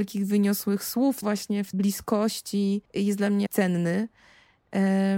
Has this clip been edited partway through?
yes; 4 cuts; at 1.2 s, 1.7 s, 2.8 s, 3.5 s

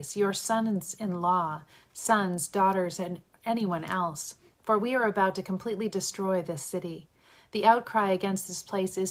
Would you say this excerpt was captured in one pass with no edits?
yes; 0 cuts

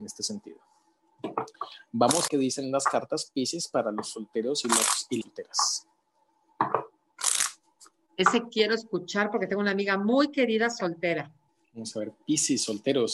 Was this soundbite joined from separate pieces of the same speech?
yes; 2 cuts; at 2.3 s, 5.2 s

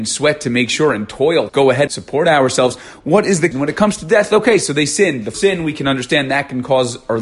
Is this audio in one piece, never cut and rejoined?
no; 4 cuts; at 1.5 s, 1.9 s, 3.5 s, 5.3 s

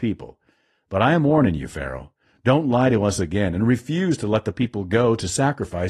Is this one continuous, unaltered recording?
yes; 0 cuts

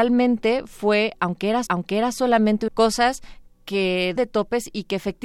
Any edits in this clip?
yes; 3 cuts; at 1.7 s, 2.7 s, 4.2 s

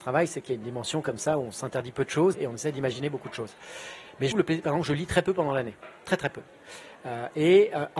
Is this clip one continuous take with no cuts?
no; 2 cuts; at 2.3 s, 4.3 s

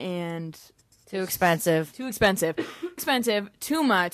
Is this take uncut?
no; 1 cut; at 3.0 s

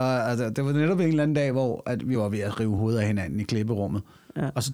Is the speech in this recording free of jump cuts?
yes; 0 cuts

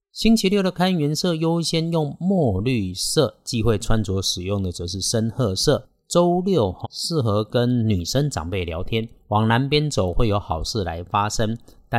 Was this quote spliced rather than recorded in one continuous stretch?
yes; 1 cut; at 6.8 s

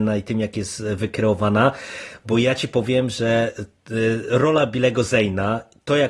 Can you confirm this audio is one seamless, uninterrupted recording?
yes; 0 cuts

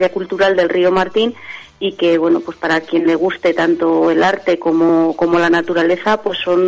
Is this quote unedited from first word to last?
yes; 0 cuts

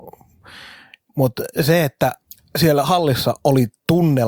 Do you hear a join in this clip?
no; 0 cuts

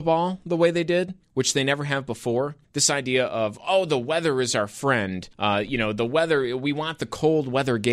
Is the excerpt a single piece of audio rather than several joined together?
no; 3 cuts; at 1.2 s, 2.6 s, 5.3 s

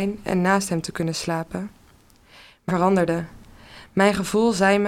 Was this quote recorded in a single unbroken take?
no; 1 cut; at 2.7 s

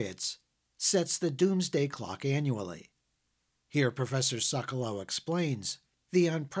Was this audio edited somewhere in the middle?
no; 0 cuts

